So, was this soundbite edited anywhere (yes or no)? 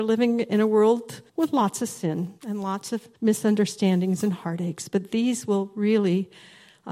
yes